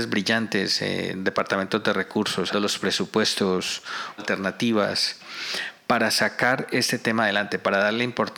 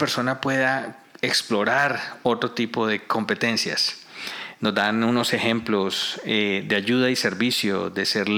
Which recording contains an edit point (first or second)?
first